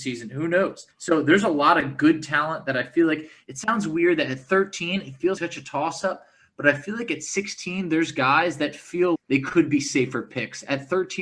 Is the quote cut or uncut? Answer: cut